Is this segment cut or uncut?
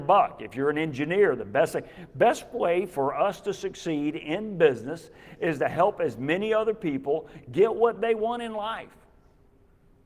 uncut